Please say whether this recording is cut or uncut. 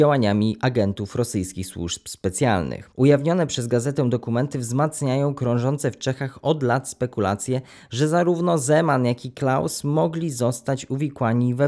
uncut